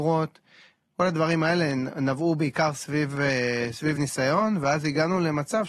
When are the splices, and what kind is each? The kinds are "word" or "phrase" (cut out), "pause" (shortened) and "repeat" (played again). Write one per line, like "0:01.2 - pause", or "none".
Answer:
none